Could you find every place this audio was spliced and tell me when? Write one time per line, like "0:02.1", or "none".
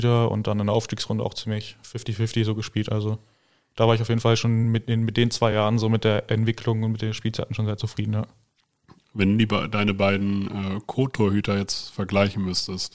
none